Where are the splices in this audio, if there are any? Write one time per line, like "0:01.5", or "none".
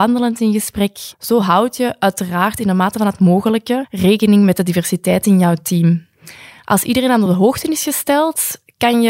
none